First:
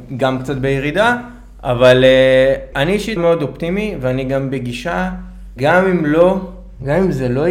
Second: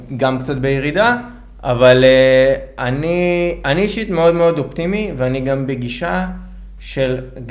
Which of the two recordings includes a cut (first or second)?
first